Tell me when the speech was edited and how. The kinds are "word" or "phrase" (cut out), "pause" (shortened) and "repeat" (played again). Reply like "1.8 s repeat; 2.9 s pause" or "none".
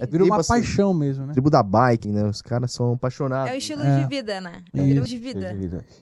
2.0 s word; 5.1 s word